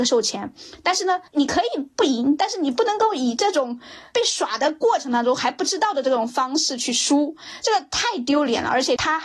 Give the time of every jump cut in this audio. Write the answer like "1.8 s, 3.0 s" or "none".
1.3 s

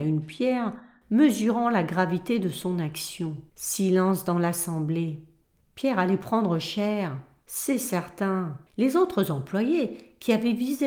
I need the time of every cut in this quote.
3.5 s, 8.7 s

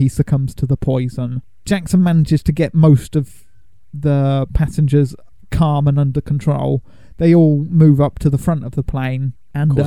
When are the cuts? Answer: none

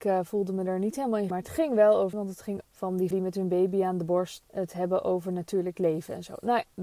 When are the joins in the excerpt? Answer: 1.3 s, 2.1 s, 2.6 s, 3.1 s, 4.4 s

